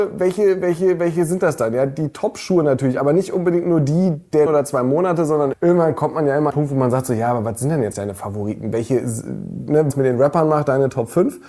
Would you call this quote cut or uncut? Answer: cut